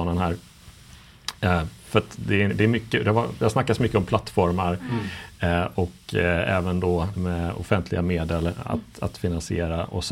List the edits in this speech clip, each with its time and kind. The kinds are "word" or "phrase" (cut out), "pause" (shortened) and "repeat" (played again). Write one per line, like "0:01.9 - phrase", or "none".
0:02.5 - phrase
0:07.1 - word